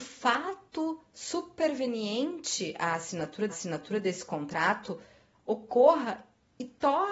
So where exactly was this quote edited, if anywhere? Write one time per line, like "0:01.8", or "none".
0:03.5